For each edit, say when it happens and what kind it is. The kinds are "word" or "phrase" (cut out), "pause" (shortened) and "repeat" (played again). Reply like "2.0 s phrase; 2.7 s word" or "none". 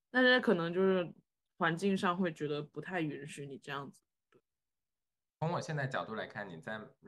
none